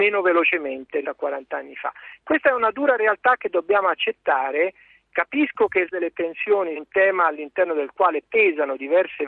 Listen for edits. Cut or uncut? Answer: cut